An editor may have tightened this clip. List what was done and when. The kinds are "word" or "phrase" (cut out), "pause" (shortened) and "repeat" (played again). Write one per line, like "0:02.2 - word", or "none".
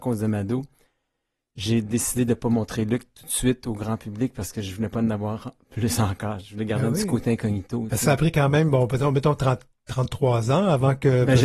none